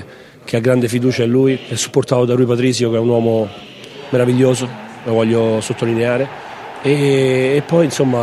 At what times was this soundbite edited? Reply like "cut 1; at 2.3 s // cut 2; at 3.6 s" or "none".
none